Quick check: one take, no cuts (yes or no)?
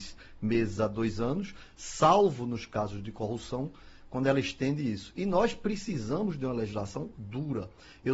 yes